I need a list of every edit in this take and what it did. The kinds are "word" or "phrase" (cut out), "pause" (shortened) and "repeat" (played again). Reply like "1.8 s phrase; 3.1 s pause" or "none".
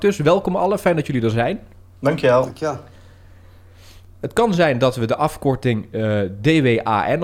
none